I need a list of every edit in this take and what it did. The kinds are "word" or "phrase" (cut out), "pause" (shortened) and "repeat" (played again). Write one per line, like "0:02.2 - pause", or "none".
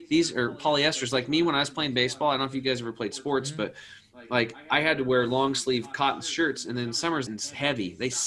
0:07.3 - phrase